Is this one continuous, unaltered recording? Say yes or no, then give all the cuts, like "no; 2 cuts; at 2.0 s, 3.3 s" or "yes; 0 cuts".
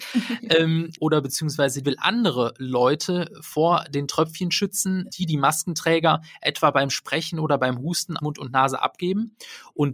no; 4 cuts; at 1.0 s, 1.8 s, 5.1 s, 8.2 s